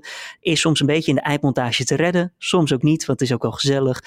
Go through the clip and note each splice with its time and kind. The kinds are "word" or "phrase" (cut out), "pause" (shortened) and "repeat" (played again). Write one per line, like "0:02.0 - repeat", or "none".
none